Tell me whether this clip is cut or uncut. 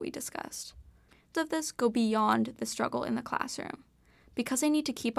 cut